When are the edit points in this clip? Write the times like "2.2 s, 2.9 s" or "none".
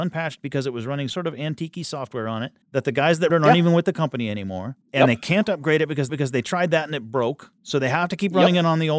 1.1 s, 2.6 s, 3.3 s, 4.8 s, 6.1 s, 7.6 s